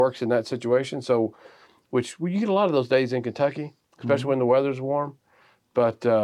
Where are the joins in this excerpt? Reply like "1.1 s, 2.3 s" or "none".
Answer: none

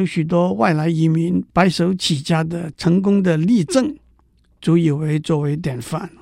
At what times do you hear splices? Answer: 1.5 s

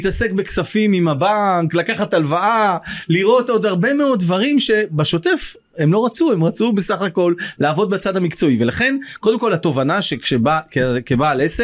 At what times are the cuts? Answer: none

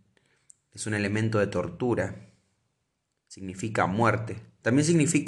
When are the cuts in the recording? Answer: none

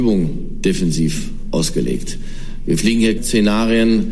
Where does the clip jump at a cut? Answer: 3.2 s

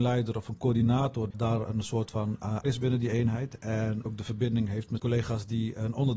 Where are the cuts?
1.3 s, 2.6 s, 4.1 s, 5.0 s

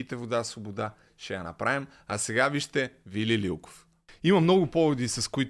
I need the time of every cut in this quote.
none

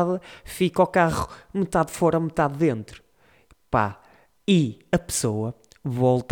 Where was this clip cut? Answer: 4.4 s

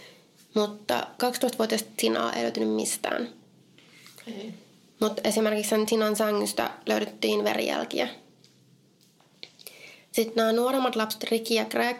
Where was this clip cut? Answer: none

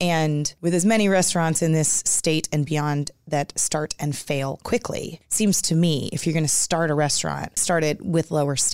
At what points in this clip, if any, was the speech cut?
7.6 s

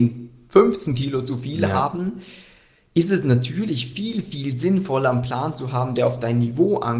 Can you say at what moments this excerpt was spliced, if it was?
none

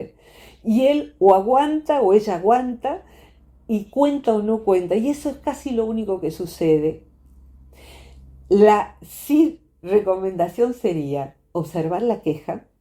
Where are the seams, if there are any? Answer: none

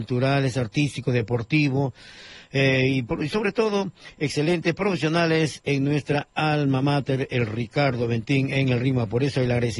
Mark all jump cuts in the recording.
none

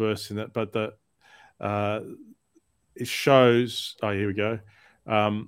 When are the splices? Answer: none

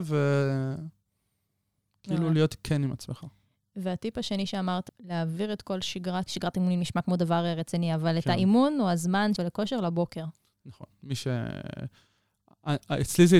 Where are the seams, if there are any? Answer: 4.9 s, 6.3 s, 9.4 s

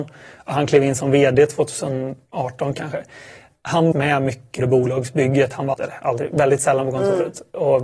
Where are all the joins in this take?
3.9 s, 4.6 s, 5.7 s

